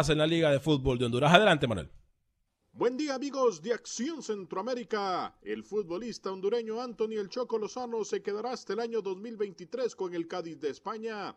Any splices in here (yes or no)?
no